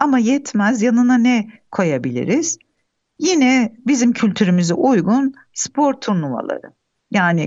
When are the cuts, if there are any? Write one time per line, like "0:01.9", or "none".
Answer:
none